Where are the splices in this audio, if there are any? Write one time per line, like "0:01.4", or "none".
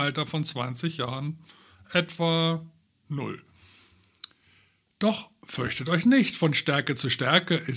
none